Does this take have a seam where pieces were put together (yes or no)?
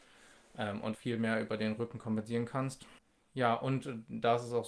yes